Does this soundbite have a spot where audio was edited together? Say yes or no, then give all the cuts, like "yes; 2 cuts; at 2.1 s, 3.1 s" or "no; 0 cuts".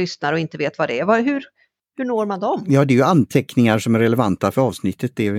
no; 0 cuts